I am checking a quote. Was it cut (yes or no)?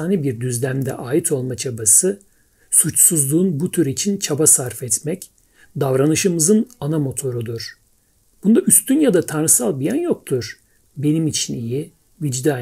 no